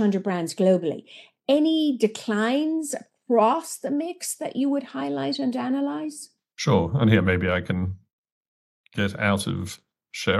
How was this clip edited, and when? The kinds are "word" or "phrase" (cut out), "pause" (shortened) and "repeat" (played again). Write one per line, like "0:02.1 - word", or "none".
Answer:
none